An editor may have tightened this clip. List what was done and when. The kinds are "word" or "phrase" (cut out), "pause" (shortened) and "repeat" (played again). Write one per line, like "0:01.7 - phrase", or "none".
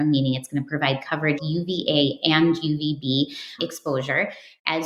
0:01.4 - phrase
0:03.6 - word